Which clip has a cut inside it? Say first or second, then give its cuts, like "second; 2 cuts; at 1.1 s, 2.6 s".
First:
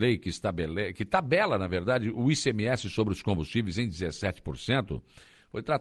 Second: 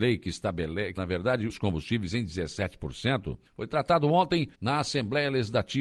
second; 4 cuts; at 1.0 s, 1.5 s, 3.5 s, 4.5 s